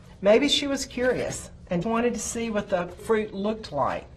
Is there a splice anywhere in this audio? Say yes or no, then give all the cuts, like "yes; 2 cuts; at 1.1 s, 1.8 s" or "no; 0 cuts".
yes; 2 cuts; at 1.8 s, 3.0 s